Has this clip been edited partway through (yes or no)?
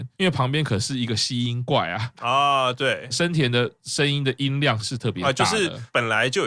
no